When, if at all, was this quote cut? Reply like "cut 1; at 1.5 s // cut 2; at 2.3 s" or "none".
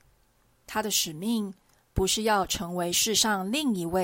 none